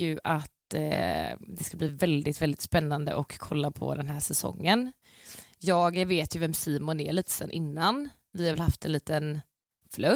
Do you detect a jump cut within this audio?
no; 0 cuts

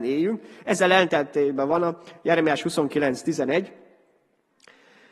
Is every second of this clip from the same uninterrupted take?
yes; 0 cuts

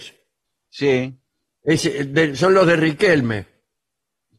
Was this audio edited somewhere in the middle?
no; 0 cuts

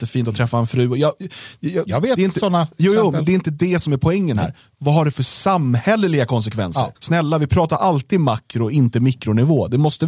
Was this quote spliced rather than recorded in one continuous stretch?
yes; 1 cut; at 7.0 s

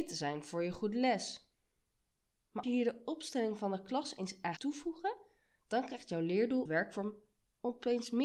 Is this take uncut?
no; 3 cuts; at 2.6 s, 4.6 s, 6.7 s

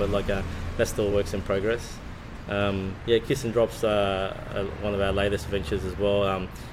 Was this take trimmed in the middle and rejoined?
no; 0 cuts

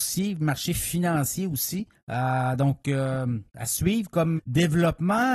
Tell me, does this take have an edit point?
yes; 3 cuts; at 1.9 s, 3.5 s, 4.4 s

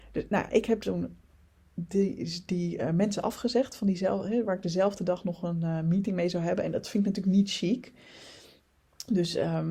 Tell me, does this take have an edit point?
no; 0 cuts

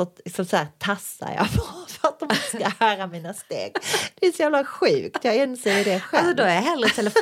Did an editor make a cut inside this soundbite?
no; 0 cuts

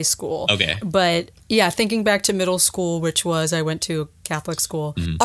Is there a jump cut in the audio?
no; 0 cuts

